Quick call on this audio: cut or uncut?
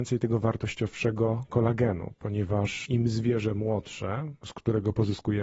uncut